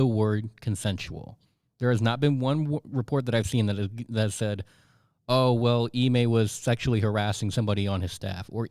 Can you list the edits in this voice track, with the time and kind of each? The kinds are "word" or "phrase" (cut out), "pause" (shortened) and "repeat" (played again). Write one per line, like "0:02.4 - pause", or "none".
none